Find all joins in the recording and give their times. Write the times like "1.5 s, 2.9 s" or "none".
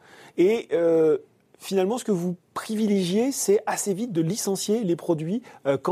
none